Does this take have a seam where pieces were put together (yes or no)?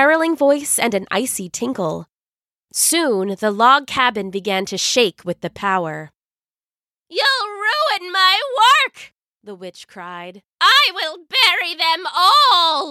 yes